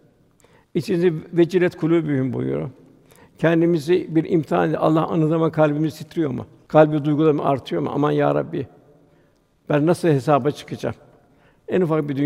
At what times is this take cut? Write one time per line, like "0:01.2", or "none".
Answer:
none